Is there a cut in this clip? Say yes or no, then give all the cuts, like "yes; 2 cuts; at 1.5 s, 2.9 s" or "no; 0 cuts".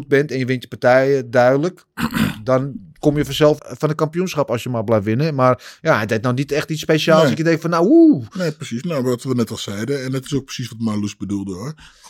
yes; 1 cut; at 3.6 s